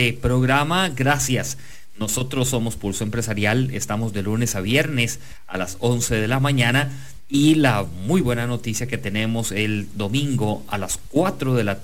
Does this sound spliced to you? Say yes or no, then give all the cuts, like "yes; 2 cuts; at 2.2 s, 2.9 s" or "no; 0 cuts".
no; 0 cuts